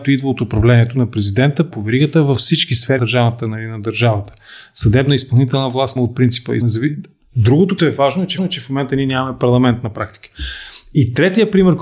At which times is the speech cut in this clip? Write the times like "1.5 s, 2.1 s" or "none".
1.7 s, 3.0 s, 6.0 s, 6.6 s, 7.8 s, 8.4 s